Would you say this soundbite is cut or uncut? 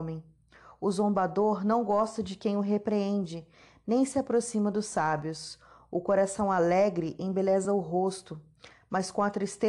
uncut